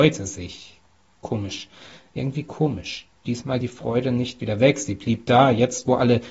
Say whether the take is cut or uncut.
cut